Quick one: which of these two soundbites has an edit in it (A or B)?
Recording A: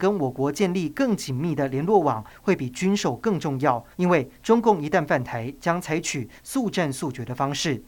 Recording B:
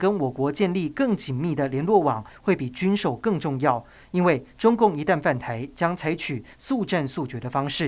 A